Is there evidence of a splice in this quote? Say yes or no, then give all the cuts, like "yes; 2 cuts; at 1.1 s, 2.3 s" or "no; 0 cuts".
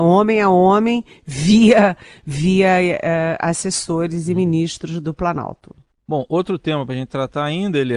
no; 0 cuts